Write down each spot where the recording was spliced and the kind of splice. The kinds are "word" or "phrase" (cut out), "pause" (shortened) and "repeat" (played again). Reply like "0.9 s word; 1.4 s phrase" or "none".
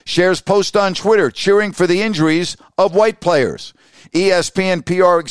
none